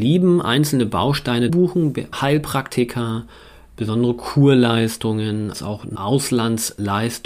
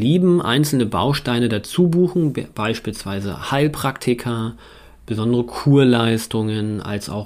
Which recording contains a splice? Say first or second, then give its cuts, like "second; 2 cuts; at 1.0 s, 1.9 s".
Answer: first; 4 cuts; at 1.5 s, 2.1 s, 5.5 s, 6.0 s